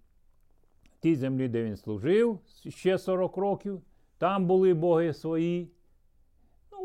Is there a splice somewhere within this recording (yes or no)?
no